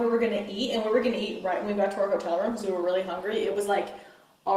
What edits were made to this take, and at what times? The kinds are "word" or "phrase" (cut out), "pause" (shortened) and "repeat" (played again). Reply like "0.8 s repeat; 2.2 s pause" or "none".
none